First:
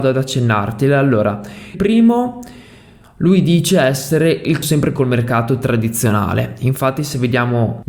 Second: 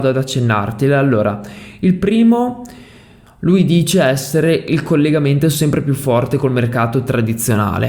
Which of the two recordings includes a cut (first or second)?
first